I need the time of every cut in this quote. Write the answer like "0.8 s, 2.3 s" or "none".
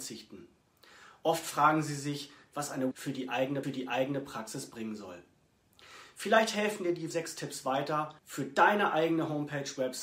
2.9 s, 3.6 s, 7.1 s, 8.2 s